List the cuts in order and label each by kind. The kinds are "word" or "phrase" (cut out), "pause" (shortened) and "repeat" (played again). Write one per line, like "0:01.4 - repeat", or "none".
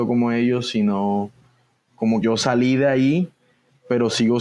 0:02.2 - word